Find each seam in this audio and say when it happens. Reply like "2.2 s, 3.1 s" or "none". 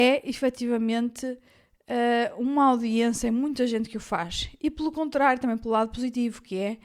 none